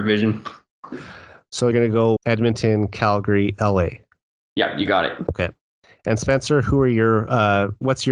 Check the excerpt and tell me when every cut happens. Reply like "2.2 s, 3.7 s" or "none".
1.7 s, 2.2 s